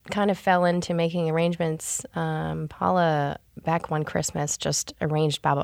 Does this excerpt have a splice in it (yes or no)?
yes